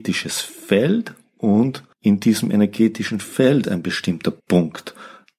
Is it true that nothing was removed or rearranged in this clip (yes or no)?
no